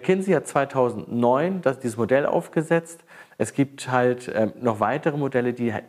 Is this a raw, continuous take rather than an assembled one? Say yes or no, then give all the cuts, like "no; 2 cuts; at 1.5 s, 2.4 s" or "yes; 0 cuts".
yes; 0 cuts